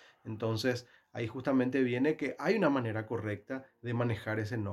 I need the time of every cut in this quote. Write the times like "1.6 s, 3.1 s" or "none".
none